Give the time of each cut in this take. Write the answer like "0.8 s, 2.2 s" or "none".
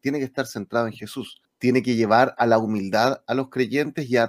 1.4 s